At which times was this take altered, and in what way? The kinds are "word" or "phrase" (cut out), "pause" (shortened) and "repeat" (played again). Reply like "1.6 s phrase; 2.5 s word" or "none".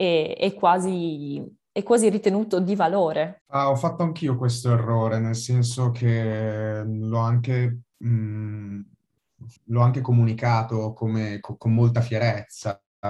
3.4 s pause; 9.6 s pause